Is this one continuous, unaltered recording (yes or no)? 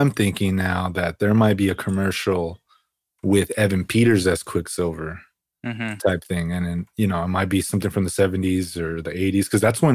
yes